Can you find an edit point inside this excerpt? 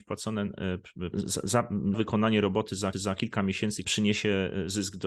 yes; 4 cuts; at 1.1 s, 1.9 s, 2.9 s, 3.8 s

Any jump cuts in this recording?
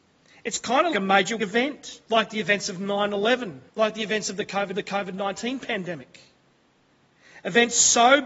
yes; 5 cuts; at 0.9 s, 1.4 s, 2.0 s, 3.7 s, 4.7 s

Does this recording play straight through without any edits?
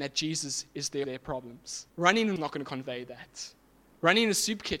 no; 3 cuts; at 1.0 s, 1.9 s, 2.4 s

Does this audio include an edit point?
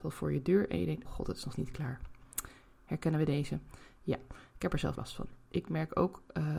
yes; 3 cuts; at 1.0 s, 1.5 s, 4.9 s

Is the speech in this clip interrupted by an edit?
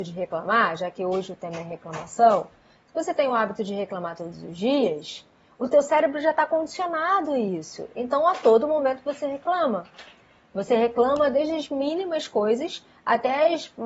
no; 0 cuts

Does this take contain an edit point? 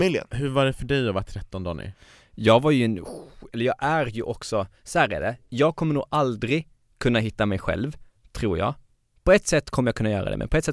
no; 0 cuts

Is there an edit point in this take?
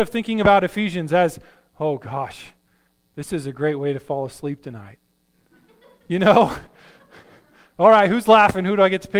no; 0 cuts

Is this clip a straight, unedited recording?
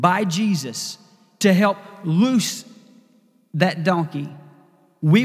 yes; 0 cuts

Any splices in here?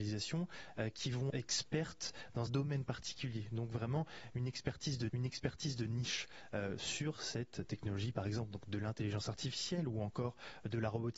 yes; 3 cuts; at 1.3 s, 2.5 s, 5.1 s

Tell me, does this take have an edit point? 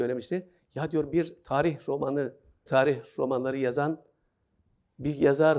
yes; 1 cut; at 2.7 s

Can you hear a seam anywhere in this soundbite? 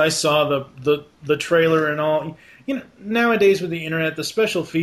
no; 0 cuts

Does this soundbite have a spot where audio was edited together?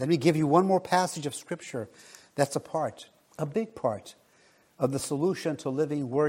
no; 0 cuts

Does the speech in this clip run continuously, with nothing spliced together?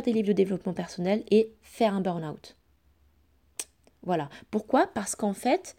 yes; 0 cuts

